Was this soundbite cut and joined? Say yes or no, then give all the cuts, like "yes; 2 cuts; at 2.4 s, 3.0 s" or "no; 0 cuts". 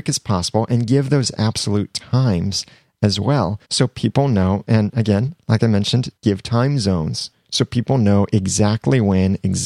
yes; 2 cuts; at 3.6 s, 6.2 s